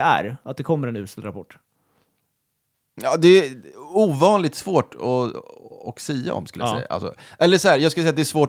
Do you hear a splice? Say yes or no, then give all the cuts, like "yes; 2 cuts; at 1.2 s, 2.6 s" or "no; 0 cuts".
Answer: no; 0 cuts